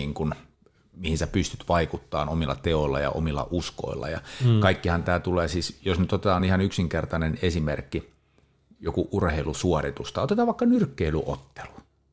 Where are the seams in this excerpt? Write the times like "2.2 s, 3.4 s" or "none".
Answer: none